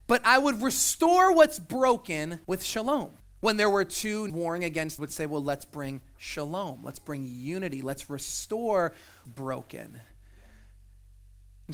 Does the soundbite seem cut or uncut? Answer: cut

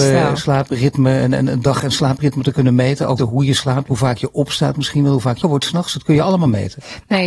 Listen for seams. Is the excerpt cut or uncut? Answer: cut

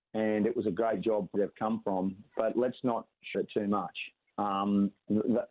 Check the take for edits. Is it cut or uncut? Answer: cut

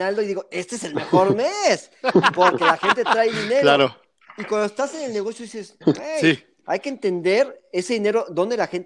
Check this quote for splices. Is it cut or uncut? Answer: uncut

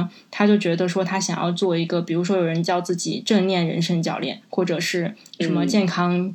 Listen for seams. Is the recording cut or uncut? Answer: uncut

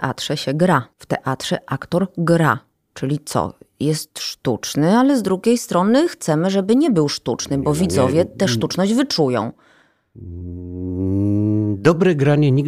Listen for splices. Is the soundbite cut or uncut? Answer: cut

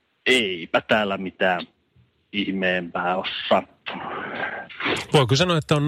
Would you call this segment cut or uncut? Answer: uncut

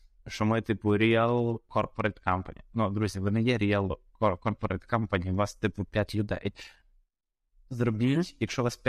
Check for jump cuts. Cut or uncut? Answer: uncut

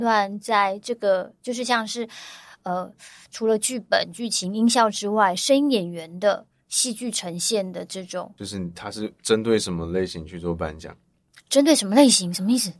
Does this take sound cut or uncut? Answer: uncut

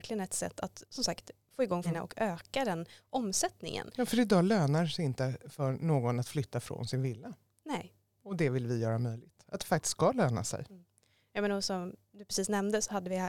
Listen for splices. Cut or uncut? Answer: cut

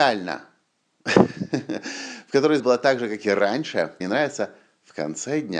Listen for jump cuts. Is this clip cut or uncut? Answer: cut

